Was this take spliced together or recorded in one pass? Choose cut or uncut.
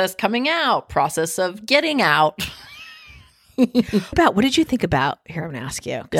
cut